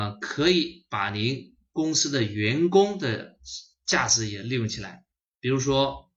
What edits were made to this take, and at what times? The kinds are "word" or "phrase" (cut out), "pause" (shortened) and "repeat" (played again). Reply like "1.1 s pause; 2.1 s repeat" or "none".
5.1 s pause

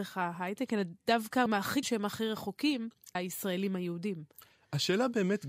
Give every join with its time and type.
1.5 s word; 1.8 s word; 3.1 s word

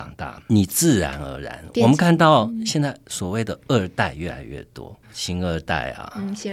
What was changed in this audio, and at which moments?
5.0 s word

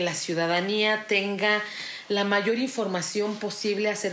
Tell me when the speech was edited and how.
none

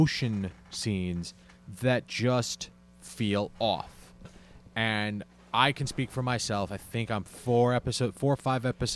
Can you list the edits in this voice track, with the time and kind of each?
none

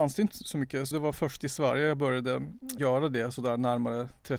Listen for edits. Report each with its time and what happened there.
0.9 s phrase; 2.8 s word

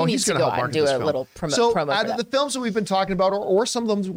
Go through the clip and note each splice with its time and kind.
none

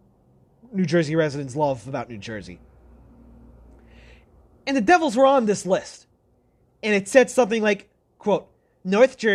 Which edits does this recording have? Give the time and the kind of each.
none

